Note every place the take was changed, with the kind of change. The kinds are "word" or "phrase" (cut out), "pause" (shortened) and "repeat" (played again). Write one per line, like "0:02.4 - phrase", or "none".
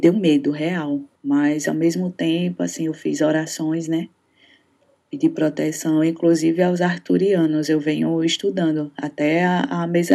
0:01.1 - pause